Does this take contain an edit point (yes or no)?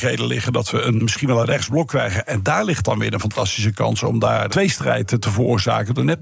yes